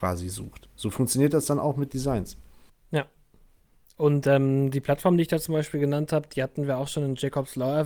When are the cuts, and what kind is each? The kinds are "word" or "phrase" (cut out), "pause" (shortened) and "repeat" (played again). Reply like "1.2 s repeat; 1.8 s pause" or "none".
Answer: none